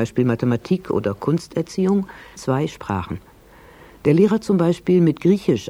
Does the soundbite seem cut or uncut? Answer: cut